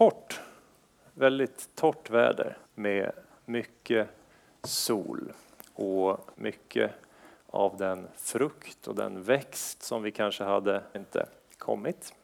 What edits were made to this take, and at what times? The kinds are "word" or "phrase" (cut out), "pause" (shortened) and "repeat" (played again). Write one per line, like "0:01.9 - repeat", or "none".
0:02.6 - pause
0:06.3 - pause
0:10.9 - phrase